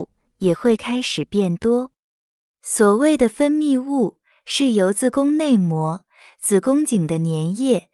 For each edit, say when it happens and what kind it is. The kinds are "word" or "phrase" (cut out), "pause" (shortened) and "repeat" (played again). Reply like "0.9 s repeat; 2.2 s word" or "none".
none